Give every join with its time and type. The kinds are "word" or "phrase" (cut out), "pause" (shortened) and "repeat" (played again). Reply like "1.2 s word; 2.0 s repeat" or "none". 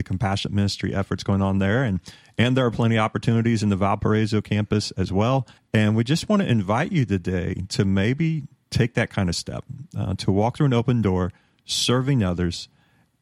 5.6 s pause